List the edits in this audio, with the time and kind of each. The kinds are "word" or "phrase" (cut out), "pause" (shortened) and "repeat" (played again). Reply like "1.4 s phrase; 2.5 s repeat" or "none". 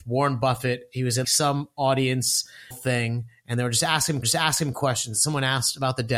1.2 s word; 2.7 s word; 4.2 s repeat